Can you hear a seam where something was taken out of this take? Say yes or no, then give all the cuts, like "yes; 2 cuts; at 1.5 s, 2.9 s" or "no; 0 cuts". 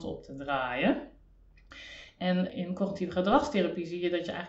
no; 0 cuts